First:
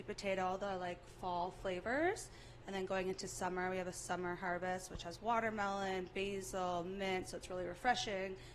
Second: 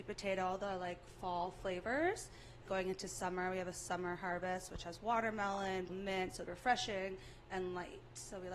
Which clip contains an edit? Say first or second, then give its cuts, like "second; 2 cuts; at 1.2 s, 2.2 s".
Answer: second; 3 cuts; at 2.7 s, 5.9 s, 6.5 s